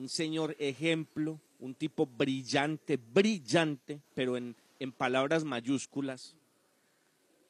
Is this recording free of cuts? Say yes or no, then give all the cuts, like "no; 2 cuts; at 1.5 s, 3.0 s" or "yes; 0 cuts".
no; 1 cut; at 1.5 s